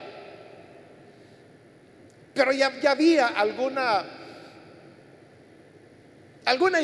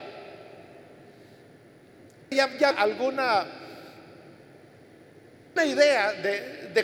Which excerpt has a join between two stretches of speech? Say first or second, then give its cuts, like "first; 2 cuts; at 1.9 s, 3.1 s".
second; 3 cuts; at 2.3 s, 2.7 s, 5.6 s